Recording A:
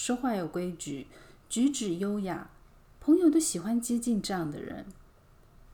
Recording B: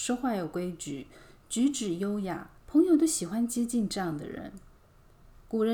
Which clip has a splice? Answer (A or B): B